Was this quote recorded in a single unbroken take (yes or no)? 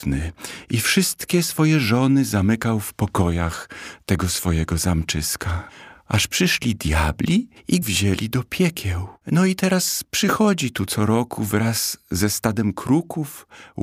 no